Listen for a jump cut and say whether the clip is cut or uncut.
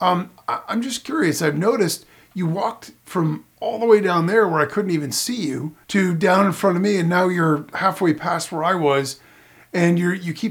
cut